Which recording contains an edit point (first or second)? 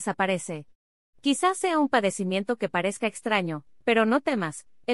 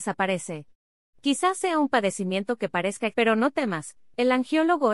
second